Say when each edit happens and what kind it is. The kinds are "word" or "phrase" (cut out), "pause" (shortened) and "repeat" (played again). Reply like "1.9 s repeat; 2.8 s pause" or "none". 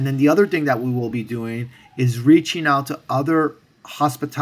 none